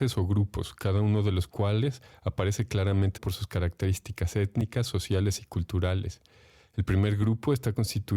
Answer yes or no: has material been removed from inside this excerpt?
yes